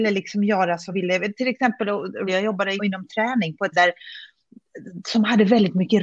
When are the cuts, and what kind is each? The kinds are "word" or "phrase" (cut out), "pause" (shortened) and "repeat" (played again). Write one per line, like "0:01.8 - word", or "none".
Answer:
0:00.9 - word
0:02.3 - word
0:02.8 - word
0:03.7 - word